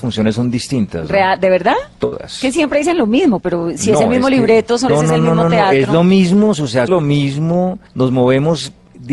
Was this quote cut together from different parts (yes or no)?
yes